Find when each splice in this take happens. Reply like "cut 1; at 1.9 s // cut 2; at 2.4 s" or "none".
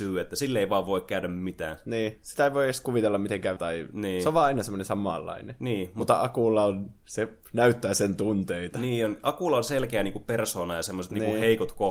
cut 1; at 3.6 s